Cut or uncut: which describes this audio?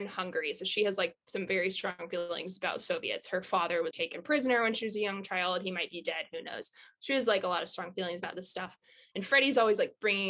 cut